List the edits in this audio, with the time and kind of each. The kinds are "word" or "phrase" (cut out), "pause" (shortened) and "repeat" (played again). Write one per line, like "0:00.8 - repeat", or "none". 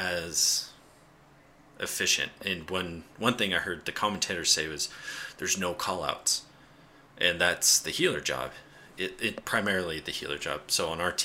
none